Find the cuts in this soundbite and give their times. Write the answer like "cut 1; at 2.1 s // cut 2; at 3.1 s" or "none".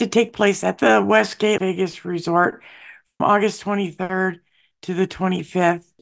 cut 1; at 1.6 s // cut 2; at 3.2 s